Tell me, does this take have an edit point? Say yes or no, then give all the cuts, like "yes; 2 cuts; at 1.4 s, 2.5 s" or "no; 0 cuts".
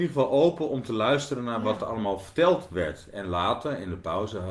no; 0 cuts